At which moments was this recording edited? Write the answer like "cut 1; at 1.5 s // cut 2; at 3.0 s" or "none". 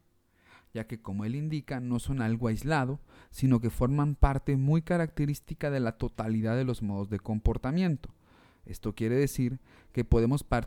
none